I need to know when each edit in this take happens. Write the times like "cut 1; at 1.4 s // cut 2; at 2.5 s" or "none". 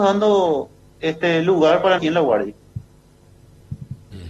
cut 1; at 2.0 s